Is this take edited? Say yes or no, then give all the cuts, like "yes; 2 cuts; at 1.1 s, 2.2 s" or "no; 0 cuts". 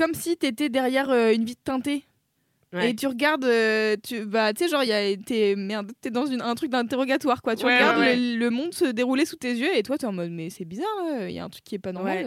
no; 0 cuts